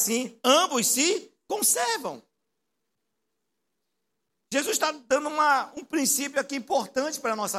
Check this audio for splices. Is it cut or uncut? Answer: uncut